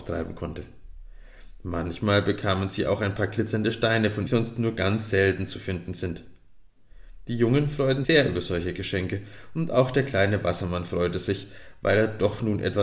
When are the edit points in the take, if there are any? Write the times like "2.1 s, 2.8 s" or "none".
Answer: 4.3 s, 8.0 s